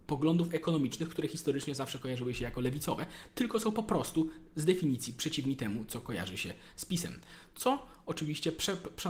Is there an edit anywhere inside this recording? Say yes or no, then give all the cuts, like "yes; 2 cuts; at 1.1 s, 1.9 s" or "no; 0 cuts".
no; 0 cuts